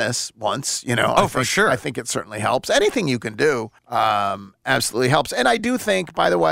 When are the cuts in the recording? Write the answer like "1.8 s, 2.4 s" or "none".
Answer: 3.8 s